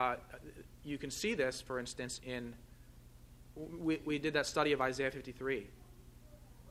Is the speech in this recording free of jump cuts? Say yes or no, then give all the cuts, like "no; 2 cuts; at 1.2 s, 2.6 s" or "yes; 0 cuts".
yes; 0 cuts